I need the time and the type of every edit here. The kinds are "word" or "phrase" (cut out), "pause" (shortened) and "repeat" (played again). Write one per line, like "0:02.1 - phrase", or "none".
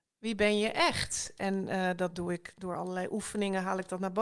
none